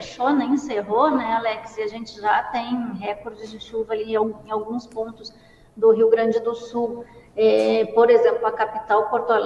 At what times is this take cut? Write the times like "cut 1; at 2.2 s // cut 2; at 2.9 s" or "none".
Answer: none